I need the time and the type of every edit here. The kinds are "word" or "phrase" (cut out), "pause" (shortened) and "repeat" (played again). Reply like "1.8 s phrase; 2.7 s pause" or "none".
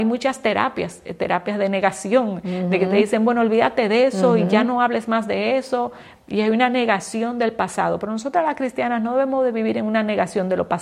none